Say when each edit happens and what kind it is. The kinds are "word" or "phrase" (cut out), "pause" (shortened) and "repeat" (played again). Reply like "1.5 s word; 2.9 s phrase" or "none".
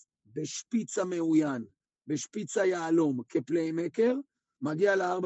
none